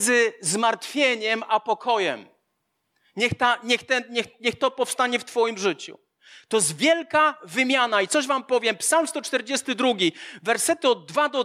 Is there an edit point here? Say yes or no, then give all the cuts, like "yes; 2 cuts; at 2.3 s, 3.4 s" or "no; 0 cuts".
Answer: no; 0 cuts